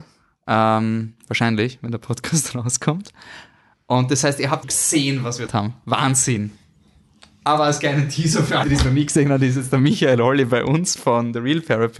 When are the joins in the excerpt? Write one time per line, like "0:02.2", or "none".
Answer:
0:04.6
0:05.5
0:08.6